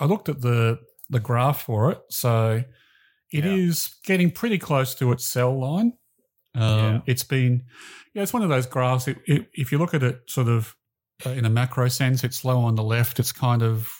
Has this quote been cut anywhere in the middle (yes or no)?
no